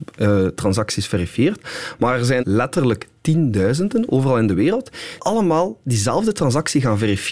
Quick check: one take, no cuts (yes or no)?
no